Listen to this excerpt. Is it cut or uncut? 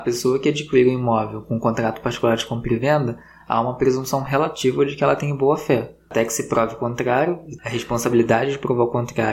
uncut